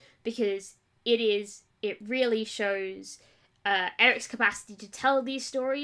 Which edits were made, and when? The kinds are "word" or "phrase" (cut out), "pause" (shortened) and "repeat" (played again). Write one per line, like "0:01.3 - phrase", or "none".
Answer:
0:01.7 - word